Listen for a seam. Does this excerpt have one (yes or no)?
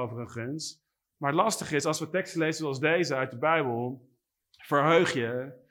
no